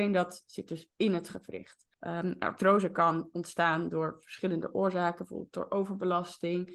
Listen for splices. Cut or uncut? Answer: cut